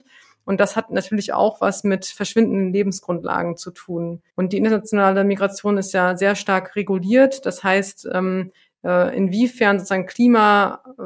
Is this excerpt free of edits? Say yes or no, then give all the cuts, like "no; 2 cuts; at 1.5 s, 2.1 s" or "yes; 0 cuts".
no; 1 cut; at 4.3 s